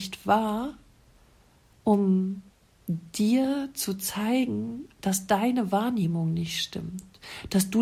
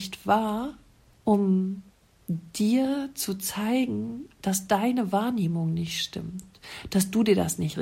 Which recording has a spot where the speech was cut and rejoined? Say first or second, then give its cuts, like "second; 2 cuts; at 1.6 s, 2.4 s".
second; 1 cut; at 1.1 s